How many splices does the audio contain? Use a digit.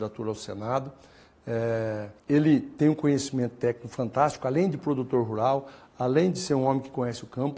1